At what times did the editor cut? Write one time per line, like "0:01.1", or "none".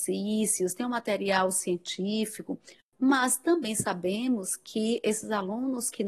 none